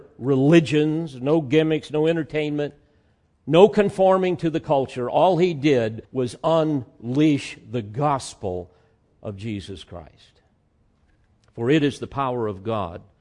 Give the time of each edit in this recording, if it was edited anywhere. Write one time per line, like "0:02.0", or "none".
0:06.0